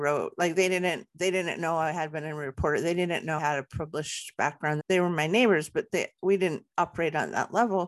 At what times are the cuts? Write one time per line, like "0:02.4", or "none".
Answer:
0:03.4
0:04.8